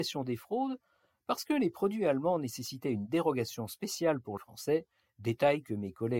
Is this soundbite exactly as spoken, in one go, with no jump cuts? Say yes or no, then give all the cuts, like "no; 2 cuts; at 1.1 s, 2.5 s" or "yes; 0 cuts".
no; 1 cut; at 4.4 s